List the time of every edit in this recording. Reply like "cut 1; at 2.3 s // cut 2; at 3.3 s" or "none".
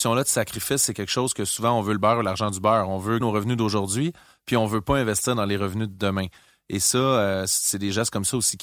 cut 1; at 3.2 s

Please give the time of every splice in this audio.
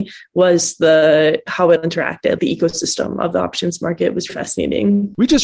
cut 1; at 1.8 s // cut 2; at 2.4 s // cut 3; at 4.3 s

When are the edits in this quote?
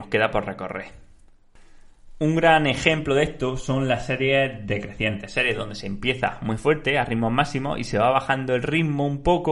none

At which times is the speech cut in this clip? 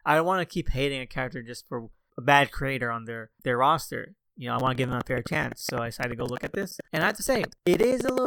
cut 1; at 2.1 s

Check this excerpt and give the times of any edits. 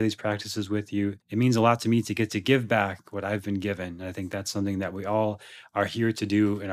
cut 1; at 1.2 s

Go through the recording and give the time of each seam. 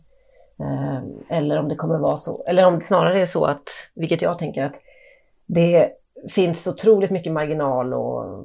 none

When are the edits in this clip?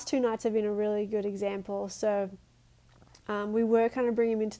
none

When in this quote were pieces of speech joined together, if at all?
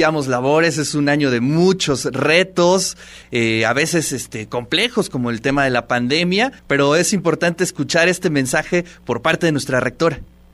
cut 1; at 3.2 s // cut 2; at 6.6 s

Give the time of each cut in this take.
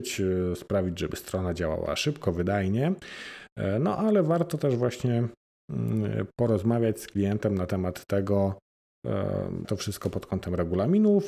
cut 1; at 9.6 s

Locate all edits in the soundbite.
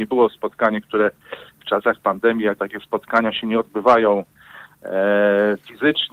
cut 1; at 2.6 s

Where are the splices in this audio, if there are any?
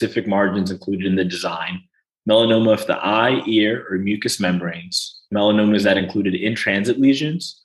none

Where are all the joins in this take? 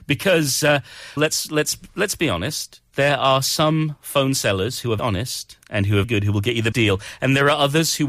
cut 1; at 1.2 s // cut 2; at 5.0 s // cut 3; at 6.0 s // cut 4; at 6.7 s

